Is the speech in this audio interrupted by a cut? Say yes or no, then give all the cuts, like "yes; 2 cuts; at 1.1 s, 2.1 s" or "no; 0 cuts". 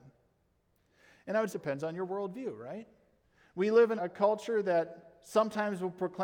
yes; 3 cuts; at 1.5 s, 3.2 s, 4.0 s